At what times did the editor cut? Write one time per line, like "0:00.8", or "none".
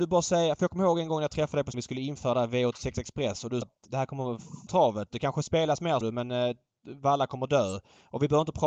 0:01.7
0:03.6
0:04.7
0:06.0

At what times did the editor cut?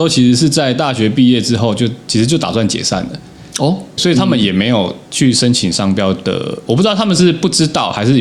0:04.0

